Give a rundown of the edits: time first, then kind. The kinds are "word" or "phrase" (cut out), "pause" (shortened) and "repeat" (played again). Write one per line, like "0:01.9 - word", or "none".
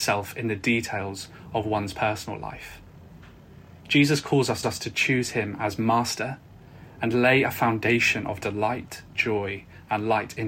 0:03.8 - pause
0:04.6 - repeat